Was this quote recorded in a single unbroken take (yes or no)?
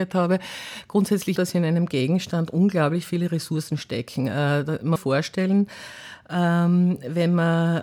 no